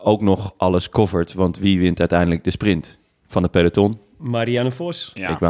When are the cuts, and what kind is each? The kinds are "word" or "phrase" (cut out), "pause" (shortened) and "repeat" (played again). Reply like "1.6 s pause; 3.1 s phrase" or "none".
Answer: none